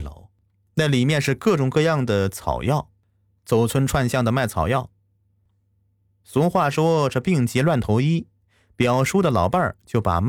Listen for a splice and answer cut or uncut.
uncut